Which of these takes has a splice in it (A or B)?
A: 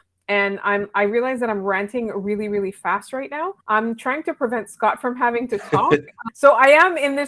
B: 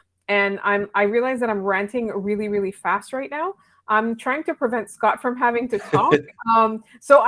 A